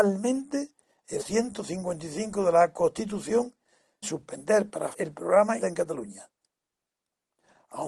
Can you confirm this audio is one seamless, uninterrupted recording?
no; 4 cuts; at 1.2 s, 4.0 s, 4.9 s, 5.6 s

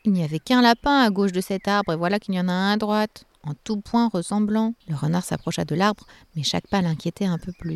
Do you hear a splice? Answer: yes; 1 cut; at 4.8 s

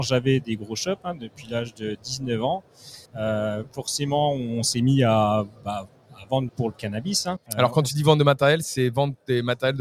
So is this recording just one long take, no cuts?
no; 3 cuts; at 3.1 s, 6.5 s, 7.5 s

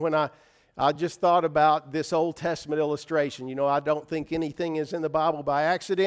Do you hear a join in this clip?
no; 0 cuts

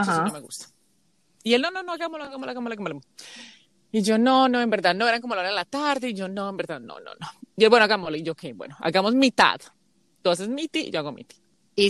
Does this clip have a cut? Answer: no; 0 cuts

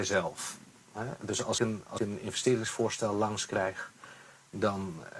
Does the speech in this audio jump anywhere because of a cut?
yes; 2 cuts; at 1.6 s, 2.0 s

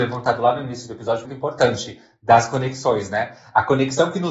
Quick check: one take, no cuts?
no; 1 cut; at 1.2 s

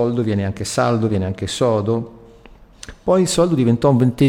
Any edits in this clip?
no; 0 cuts

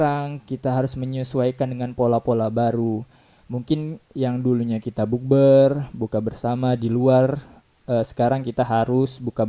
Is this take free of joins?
yes; 0 cuts

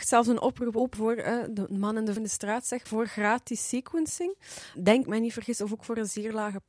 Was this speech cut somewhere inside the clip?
yes; 4 cuts; at 0.9 s, 2.2 s, 2.9 s, 5.0 s

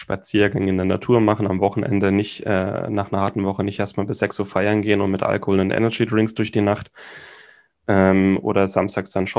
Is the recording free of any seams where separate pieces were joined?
yes; 0 cuts

